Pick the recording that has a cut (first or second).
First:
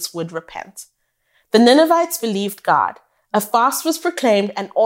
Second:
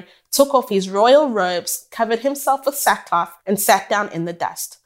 second